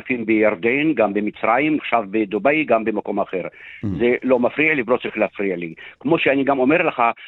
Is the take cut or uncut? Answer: cut